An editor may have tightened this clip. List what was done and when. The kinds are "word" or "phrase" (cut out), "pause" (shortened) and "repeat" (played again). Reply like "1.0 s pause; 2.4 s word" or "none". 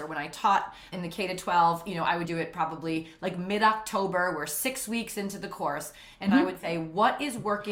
0.9 s word; 2.2 s word